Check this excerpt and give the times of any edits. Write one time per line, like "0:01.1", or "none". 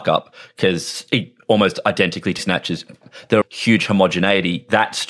0:02.4
0:03.4